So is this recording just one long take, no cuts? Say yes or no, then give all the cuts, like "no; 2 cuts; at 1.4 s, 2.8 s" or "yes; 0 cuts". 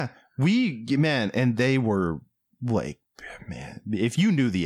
yes; 0 cuts